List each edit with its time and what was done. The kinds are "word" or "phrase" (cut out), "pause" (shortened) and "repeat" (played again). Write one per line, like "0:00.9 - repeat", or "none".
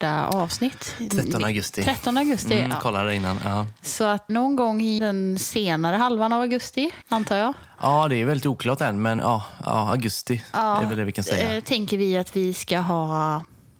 0:04.3 - word
0:05.0 - word
0:07.0 - phrase
0:09.2 - word